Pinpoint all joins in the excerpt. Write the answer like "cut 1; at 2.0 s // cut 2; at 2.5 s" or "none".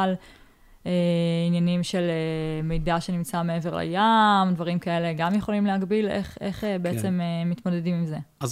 none